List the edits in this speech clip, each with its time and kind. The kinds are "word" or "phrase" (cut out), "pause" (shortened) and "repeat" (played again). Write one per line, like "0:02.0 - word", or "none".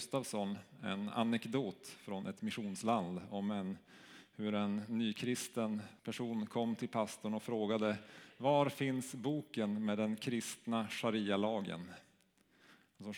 0:06.0 - pause